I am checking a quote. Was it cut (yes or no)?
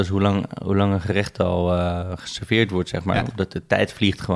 no